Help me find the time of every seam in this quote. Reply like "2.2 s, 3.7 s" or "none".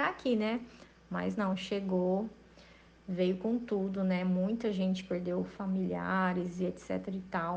none